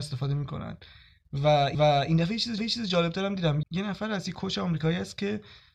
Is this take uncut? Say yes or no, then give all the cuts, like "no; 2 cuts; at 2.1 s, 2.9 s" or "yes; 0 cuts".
no; 3 cuts; at 1.7 s, 2.6 s, 3.6 s